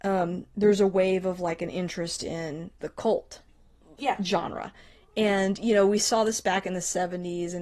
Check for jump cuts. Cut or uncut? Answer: uncut